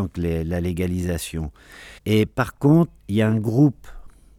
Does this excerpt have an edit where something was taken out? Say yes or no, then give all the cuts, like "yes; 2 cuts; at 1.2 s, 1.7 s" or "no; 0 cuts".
yes; 2 cuts; at 2.0 s, 3.0 s